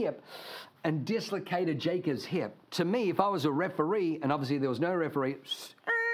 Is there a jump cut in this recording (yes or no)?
yes